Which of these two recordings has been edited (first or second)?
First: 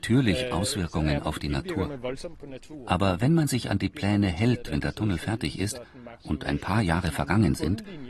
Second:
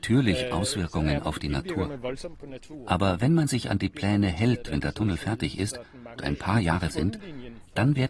second